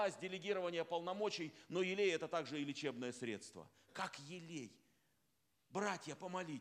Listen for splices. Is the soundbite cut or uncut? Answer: uncut